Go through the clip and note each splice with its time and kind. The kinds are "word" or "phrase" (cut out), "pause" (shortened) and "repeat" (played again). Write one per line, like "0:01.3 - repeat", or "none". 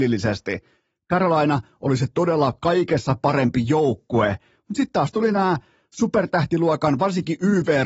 none